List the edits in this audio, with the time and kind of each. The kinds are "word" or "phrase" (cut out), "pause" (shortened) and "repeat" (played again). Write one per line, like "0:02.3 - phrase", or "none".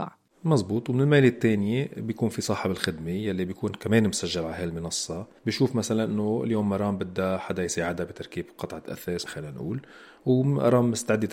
0:09.3 - phrase

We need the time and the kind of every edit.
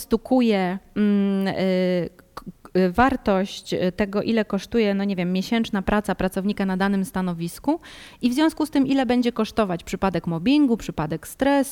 none

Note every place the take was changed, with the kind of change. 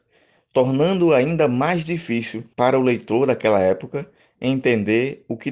0:02.5 - pause

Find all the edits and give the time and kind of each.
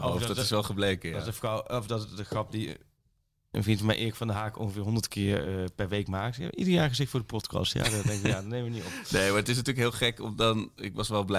none

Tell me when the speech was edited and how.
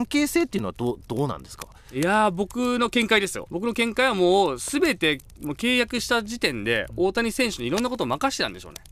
0:03.5 - phrase

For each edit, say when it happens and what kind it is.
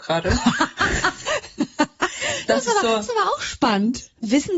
none

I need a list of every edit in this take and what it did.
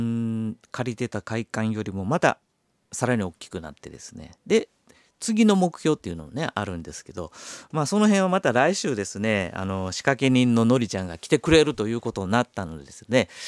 0:04.4 - pause

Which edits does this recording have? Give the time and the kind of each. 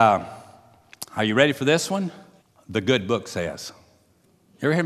0:01.1 - pause
0:02.4 - pause

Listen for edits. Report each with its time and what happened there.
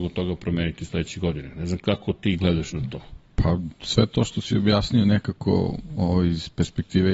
none

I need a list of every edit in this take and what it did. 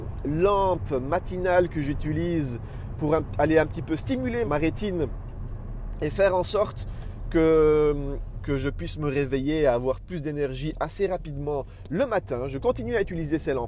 0:04.4 - word
0:08.4 - word

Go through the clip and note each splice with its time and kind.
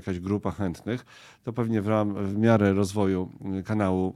none

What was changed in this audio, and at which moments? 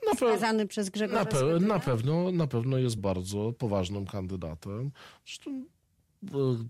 0:03.0 - word

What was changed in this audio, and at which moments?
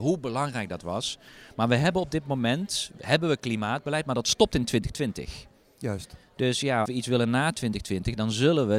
0:06.9 - word

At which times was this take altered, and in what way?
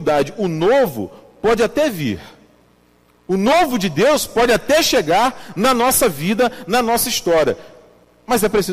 none

